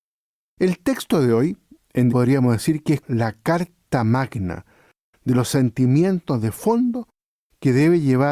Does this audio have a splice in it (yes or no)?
yes